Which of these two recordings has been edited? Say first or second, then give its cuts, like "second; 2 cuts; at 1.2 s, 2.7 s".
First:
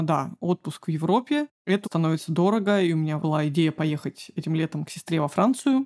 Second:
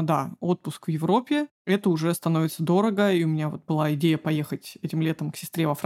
first; 2 cuts; at 1.8 s, 3.2 s